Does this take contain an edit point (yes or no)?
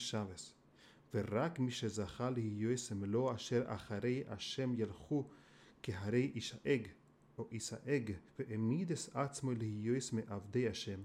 yes